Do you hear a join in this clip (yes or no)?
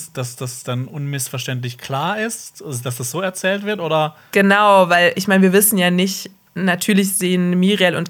no